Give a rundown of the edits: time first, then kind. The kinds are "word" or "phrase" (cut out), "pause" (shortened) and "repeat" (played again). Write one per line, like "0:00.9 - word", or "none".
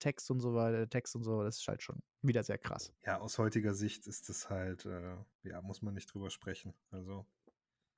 0:02.1 - pause
0:03.0 - pause
0:05.3 - pause